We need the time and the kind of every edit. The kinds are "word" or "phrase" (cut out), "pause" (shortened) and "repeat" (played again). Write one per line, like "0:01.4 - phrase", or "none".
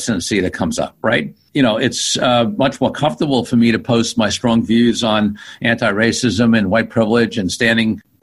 none